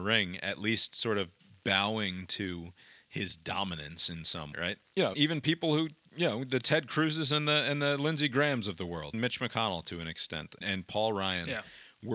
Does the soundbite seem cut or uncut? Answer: cut